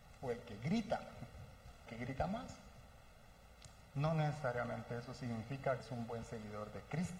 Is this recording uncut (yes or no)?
no